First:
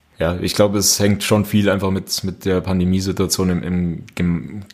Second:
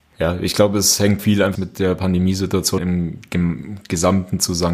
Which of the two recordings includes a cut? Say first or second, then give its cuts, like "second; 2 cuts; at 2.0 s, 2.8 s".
second; 3 cuts; at 1.2 s, 1.5 s, 2.8 s